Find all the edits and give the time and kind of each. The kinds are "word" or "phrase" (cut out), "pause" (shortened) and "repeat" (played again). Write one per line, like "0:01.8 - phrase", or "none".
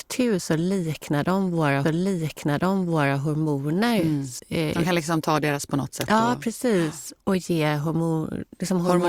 0:01.8 - repeat
0:04.4 - word
0:05.7 - word